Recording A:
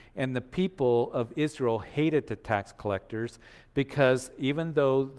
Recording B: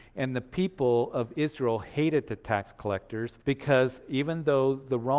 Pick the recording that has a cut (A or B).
B